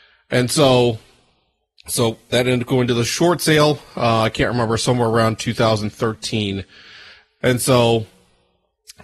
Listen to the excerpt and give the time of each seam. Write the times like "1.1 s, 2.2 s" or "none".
none